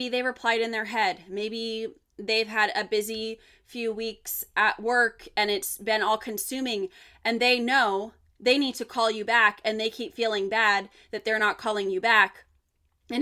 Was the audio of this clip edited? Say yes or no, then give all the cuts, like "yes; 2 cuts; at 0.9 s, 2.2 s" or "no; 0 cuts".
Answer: no; 0 cuts